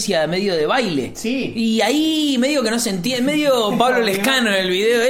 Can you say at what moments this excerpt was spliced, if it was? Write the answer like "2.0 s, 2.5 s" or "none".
none